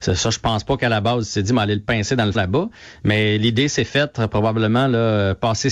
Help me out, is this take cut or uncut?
cut